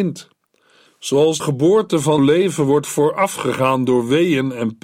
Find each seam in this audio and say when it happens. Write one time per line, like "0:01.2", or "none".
0:01.4
0:02.2

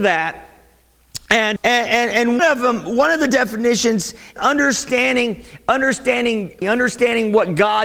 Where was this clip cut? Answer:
0:01.6
0:02.4
0:04.4
0:06.6

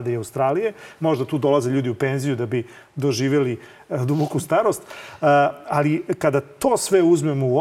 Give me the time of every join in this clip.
none

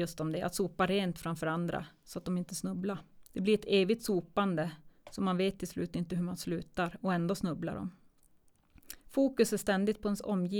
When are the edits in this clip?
0:03.3
0:05.0
0:09.0

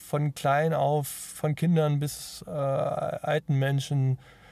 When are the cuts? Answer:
none

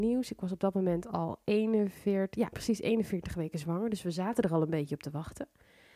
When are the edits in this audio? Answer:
0:02.5

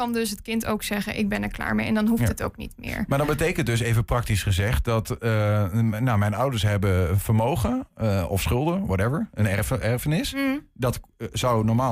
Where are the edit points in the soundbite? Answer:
none

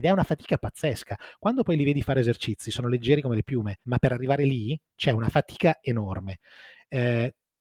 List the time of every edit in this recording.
0:03.8

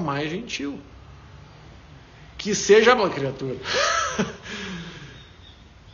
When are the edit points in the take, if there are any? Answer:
0:03.0

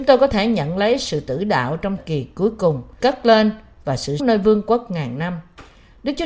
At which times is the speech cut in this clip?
0:02.0
0:03.0
0:04.2

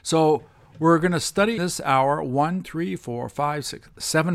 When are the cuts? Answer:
0:01.6
0:02.6

